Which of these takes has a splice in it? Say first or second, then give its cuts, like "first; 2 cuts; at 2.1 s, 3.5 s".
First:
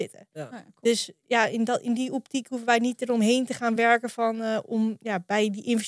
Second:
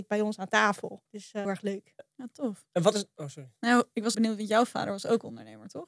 second; 4 cuts; at 1.1 s, 1.4 s, 3.6 s, 4.1 s